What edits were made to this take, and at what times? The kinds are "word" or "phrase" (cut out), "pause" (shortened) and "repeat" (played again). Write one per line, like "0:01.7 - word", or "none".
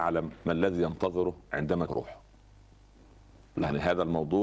0:01.9 - word